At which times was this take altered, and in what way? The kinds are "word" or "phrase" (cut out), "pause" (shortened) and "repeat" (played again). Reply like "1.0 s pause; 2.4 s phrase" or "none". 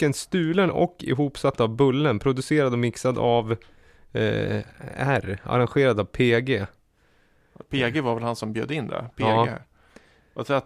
none